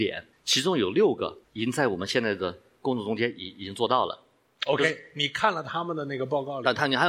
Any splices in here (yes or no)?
no